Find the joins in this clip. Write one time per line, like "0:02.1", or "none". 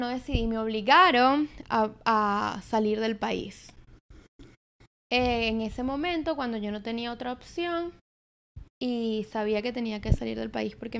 none